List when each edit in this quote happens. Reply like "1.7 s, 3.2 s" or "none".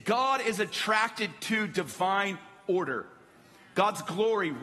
none